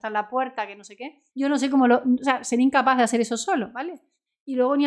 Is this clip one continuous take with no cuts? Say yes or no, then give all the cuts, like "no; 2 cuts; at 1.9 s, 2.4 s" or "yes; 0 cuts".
no; 1 cut; at 1.3 s